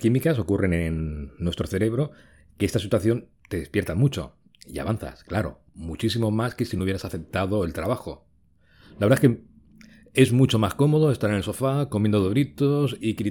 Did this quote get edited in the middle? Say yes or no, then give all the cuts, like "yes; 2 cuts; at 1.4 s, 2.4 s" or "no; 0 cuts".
no; 0 cuts